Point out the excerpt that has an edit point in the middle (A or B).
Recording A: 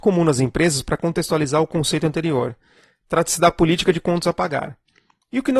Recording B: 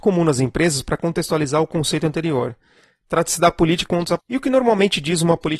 B